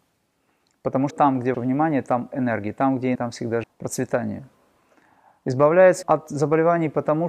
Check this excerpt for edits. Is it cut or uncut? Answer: cut